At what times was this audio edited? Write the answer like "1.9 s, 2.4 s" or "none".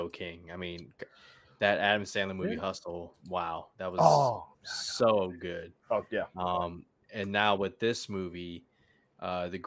4.5 s